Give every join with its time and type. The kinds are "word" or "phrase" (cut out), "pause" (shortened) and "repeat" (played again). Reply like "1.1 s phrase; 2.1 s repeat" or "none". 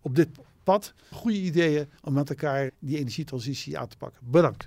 1.1 s phrase; 2.0 s pause; 2.7 s word